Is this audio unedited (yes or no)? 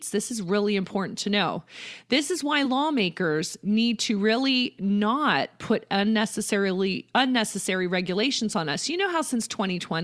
yes